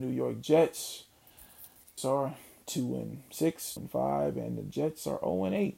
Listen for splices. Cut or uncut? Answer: cut